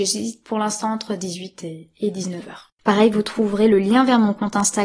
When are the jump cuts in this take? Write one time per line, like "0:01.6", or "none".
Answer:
0:02.7